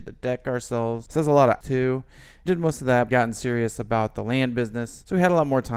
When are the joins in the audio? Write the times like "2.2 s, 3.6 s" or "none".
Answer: 1.6 s, 2.5 s, 3.1 s